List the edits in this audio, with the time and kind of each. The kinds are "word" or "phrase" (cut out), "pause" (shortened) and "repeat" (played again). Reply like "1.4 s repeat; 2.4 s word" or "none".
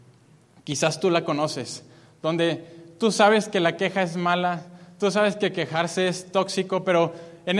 none